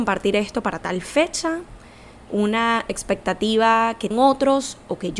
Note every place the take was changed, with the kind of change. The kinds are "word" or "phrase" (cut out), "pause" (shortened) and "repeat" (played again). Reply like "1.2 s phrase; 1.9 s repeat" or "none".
2.3 s word; 4.1 s word